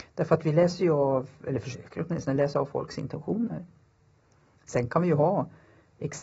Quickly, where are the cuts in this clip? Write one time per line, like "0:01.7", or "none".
none

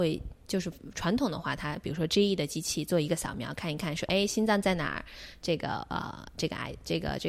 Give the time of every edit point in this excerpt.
none

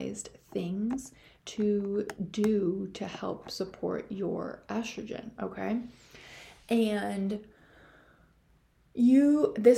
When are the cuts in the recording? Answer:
none

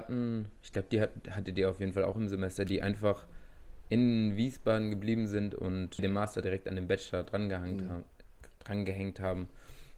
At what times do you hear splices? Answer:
none

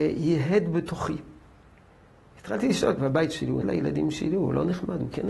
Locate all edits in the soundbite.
0:03.0
0:03.6

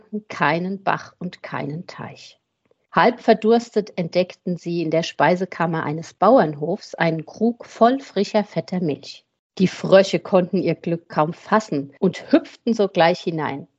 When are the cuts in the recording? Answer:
none

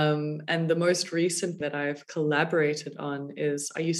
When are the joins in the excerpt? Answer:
0:01.6

